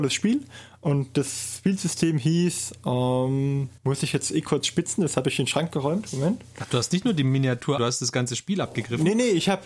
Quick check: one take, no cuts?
no; 2 cuts; at 3.8 s, 7.8 s

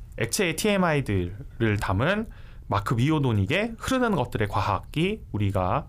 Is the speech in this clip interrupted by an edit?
no; 0 cuts

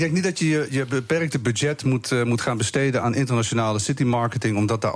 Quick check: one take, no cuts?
yes; 0 cuts

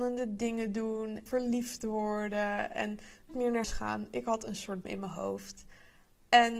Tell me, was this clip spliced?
yes; 4 cuts; at 1.3 s, 3.3 s, 3.6 s, 4.8 s

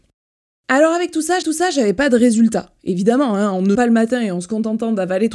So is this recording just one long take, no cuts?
no; 2 cuts; at 1.4 s, 3.7 s

